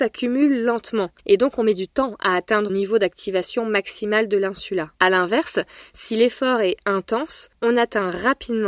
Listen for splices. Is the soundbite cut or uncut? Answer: cut